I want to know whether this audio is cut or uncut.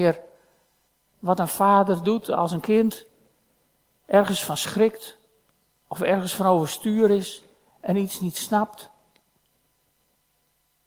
uncut